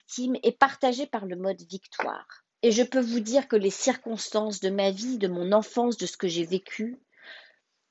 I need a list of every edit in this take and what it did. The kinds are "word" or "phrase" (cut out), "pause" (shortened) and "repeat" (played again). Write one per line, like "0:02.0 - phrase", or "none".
0:02.5 - pause